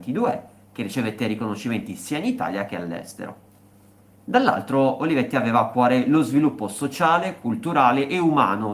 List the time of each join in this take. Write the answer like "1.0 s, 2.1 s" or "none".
none